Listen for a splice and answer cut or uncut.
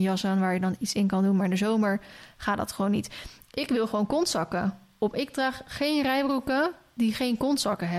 uncut